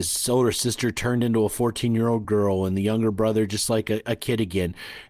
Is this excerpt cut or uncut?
uncut